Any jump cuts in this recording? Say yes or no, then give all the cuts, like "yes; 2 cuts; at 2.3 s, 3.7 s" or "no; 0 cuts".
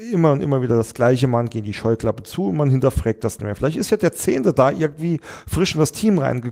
no; 0 cuts